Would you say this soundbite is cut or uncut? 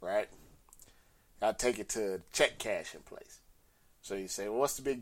uncut